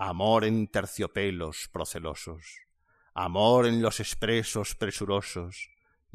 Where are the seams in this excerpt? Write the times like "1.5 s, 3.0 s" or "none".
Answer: none